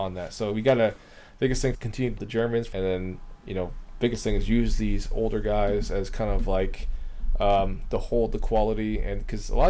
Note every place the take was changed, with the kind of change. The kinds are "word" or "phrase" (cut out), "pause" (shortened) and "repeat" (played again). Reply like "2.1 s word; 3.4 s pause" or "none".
1.7 s phrase; 2.2 s word; 2.7 s phrase